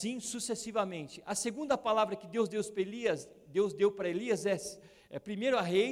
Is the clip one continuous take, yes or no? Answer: yes